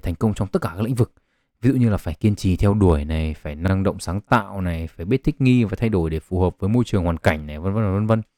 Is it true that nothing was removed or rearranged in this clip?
yes; 0 cuts

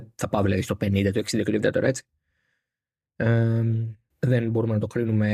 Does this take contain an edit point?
yes; 2 cuts; at 1.6 s, 4.1 s

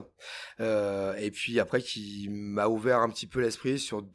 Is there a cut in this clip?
no; 0 cuts

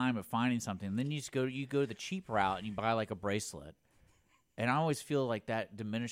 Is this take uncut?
yes; 0 cuts

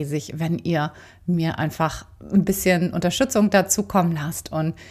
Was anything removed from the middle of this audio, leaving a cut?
no; 0 cuts

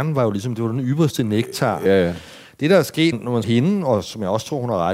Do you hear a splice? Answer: yes; 3 cuts; at 1.9 s, 3.1 s, 3.4 s

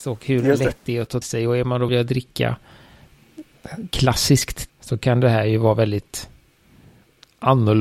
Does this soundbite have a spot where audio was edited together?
yes; 3 cuts; at 1.2 s, 1.9 s, 4.7 s

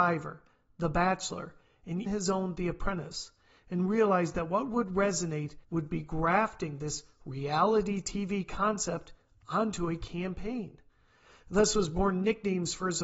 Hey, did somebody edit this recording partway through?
yes; 2 cuts; at 2.1 s, 5.6 s

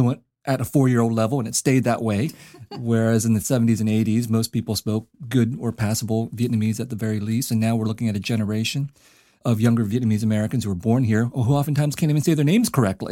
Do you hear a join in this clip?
no; 0 cuts

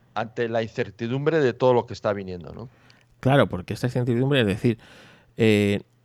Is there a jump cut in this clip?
no; 0 cuts

